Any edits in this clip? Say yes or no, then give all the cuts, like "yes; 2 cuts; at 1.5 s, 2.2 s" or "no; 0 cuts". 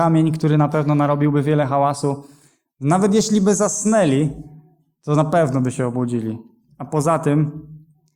no; 0 cuts